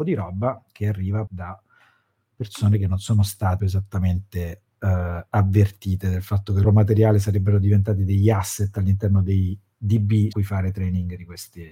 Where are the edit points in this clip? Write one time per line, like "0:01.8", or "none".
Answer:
0:01.3
0:03.6
0:06.6
0:10.3